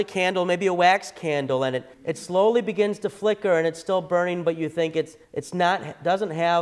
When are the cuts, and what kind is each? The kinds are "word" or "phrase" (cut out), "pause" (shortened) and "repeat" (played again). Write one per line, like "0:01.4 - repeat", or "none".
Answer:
0:01.9 - pause
0:05.2 - pause